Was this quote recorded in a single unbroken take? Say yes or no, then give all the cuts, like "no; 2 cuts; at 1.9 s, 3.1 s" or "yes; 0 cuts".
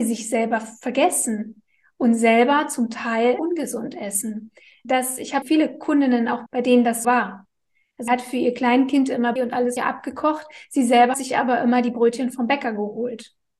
no; 9 cuts; at 3.4 s, 4.8 s, 5.4 s, 6.5 s, 7.0 s, 8.1 s, 9.4 s, 9.8 s, 11.1 s